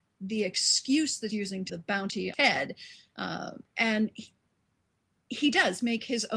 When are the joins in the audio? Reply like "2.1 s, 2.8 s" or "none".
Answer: 1.3 s, 1.7 s, 2.3 s, 3.7 s

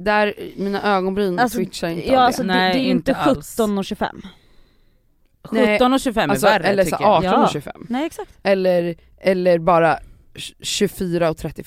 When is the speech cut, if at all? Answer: none

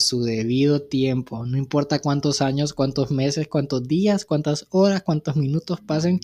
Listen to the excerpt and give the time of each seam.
none

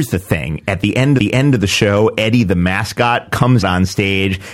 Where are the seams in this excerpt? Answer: 1.2 s, 3.6 s

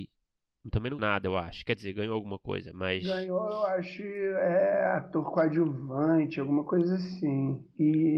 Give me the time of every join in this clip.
1.0 s

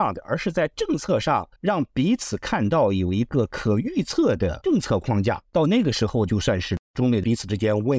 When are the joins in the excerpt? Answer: 1.6 s

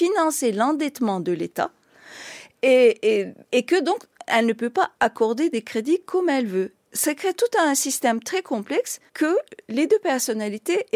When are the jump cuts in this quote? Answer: 3.4 s, 5.0 s, 9.1 s

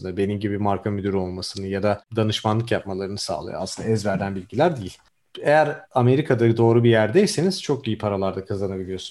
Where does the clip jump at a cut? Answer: 5.8 s

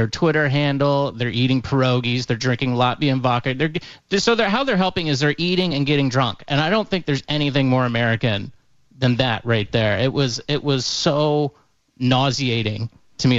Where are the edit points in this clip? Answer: none

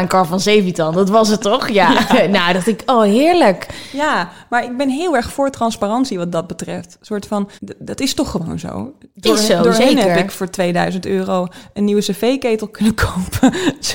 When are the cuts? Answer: 7.6 s

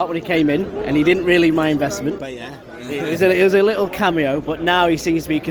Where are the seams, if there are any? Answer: 1.5 s, 2.2 s

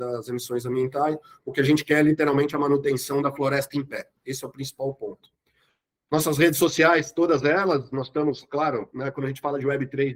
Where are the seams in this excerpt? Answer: none

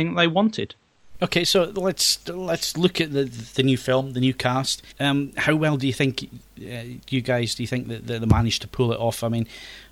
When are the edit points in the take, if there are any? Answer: 4.9 s

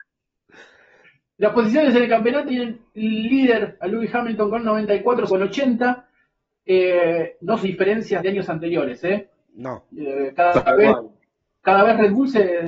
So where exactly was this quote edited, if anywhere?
2.5 s, 2.9 s, 5.3 s, 7.6 s, 8.2 s

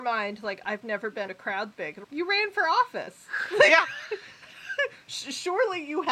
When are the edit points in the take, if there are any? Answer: 1.3 s, 1.7 s, 2.0 s

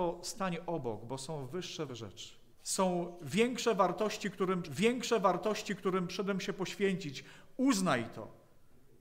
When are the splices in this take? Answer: 1.9 s, 2.5 s, 4.6 s

